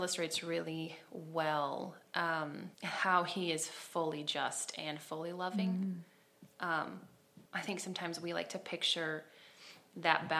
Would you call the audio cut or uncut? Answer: cut